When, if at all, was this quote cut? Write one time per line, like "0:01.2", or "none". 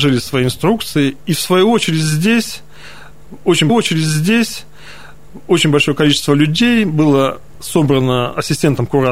0:03.7